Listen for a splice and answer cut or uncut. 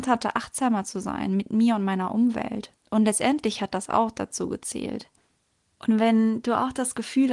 uncut